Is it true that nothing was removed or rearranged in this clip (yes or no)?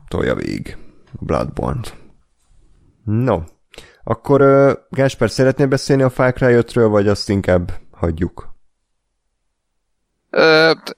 yes